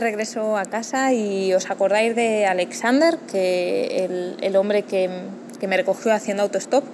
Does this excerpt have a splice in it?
no; 0 cuts

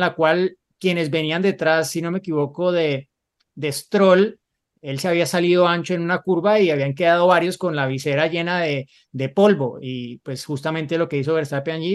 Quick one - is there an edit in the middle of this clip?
no; 0 cuts

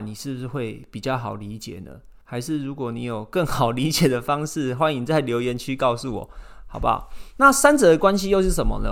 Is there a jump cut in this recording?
yes; 1 cut; at 2.2 s

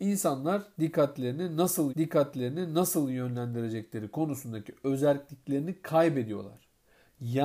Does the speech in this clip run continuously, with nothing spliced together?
no; 1 cut; at 1.9 s

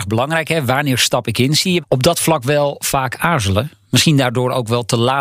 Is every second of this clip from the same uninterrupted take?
no; 1 cut; at 1.8 s

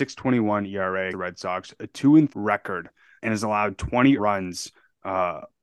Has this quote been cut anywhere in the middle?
yes; 4 cuts; at 1.1 s, 2.3 s, 3.2 s, 4.2 s

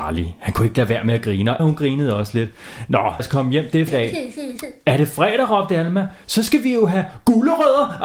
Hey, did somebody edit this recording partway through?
yes; 3 cuts; at 1.6 s, 3.2 s, 3.9 s

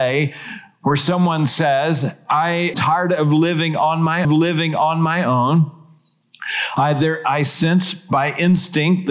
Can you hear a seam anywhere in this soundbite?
yes; 2 cuts; at 2.7 s, 4.2 s

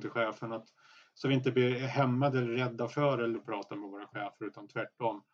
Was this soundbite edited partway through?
yes; 1 cut; at 3.4 s

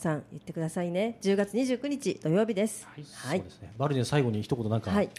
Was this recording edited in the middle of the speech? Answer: no; 0 cuts

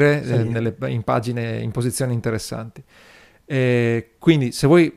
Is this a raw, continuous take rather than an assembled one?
yes; 0 cuts

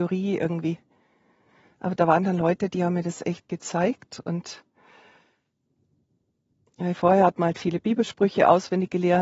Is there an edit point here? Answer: no; 0 cuts

